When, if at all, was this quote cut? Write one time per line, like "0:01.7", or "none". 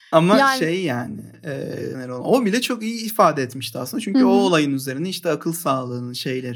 0:01.9

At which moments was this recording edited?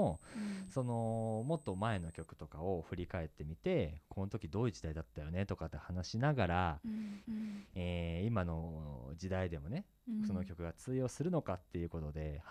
0:07.2

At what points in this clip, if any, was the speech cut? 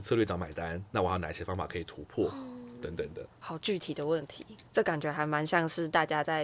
0:03.3
0:04.7

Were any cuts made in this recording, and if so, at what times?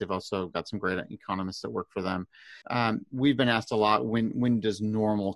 0:02.6

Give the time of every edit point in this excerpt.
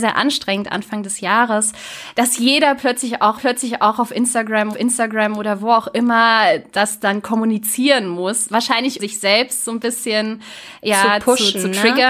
0:03.4
0:04.7
0:09.0

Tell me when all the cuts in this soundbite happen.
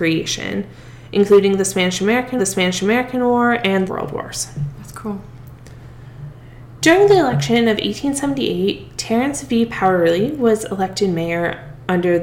0:02.4
0:03.9

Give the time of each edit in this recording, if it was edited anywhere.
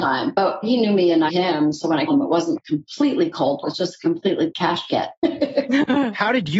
0:01.3
0:02.1
0:02.6
0:03.6
0:04.5

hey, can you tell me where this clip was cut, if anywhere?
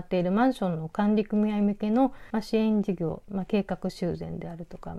0:02.3

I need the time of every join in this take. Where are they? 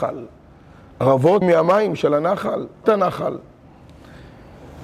0:01.4
0:02.8

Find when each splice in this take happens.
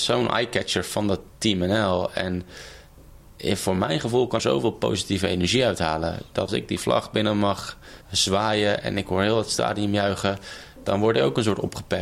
0:01.3
0:04.4
0:06.5
0:08.0

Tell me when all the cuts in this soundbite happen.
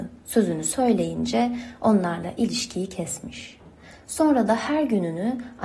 none

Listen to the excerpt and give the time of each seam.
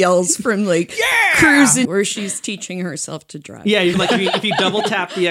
0:01.8
0:03.9

